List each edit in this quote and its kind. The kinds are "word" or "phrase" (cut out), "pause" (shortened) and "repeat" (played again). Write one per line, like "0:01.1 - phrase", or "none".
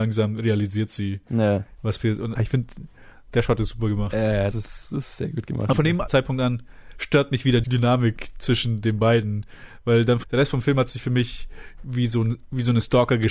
0:02.4 - word
0:04.5 - word
0:05.7 - word
0:06.1 - phrase
0:07.6 - word
0:10.2 - phrase